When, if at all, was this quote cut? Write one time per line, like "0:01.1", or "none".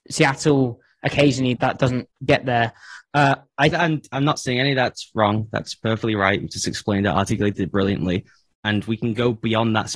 0:01.6
0:03.7

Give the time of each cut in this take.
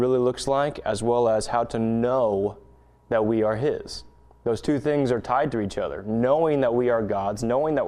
none

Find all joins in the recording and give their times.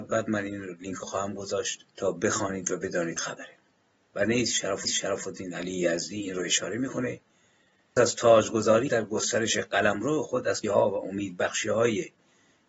0:01.0
0:01.9
0:03.2
0:04.8
0:08.0
0:08.9
0:10.6

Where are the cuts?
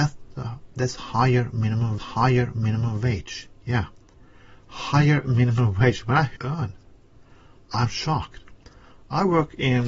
0:02.0
0:06.4

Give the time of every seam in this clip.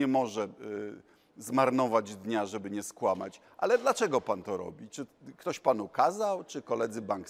none

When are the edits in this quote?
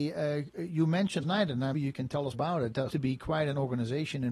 0:01.2
0:01.7
0:02.3
0:02.9

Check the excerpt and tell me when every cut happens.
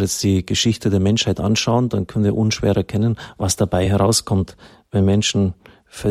none

